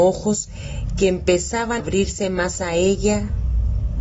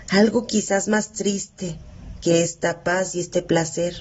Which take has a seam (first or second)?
first